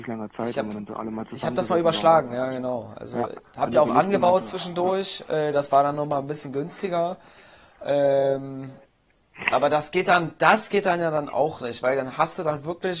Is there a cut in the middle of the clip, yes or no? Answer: no